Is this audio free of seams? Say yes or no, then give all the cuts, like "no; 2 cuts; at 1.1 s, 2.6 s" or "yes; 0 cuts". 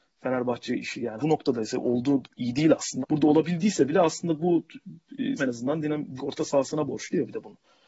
no; 5 cuts; at 1.2 s, 2.2 s, 3.0 s, 5.4 s, 6.2 s